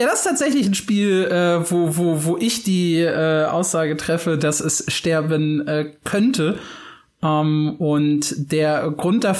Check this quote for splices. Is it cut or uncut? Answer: uncut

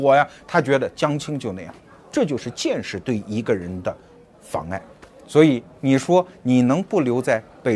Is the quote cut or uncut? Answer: uncut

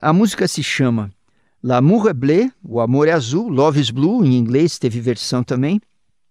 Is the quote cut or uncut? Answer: uncut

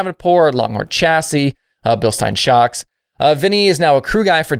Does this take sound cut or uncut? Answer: uncut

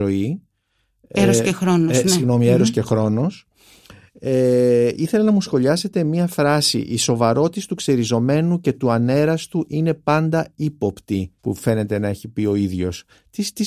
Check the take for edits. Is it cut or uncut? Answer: cut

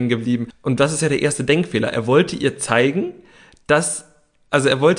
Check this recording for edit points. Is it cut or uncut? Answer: uncut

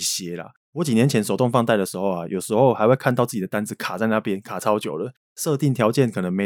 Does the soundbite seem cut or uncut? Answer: uncut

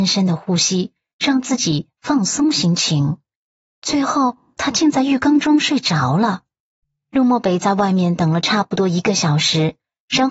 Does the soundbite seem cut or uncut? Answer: uncut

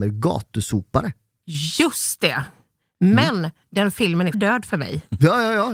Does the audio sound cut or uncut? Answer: cut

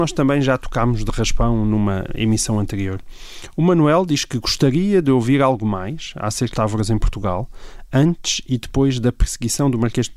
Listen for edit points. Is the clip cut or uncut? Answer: cut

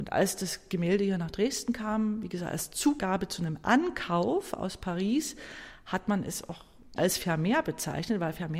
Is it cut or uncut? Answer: cut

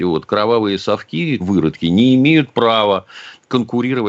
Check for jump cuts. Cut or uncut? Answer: cut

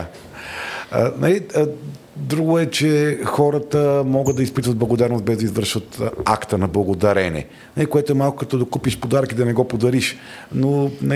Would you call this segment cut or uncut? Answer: uncut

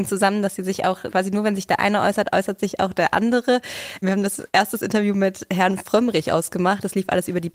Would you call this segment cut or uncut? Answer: uncut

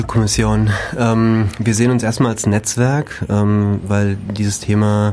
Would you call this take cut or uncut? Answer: uncut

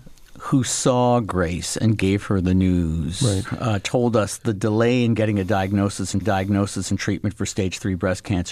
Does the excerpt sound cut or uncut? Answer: cut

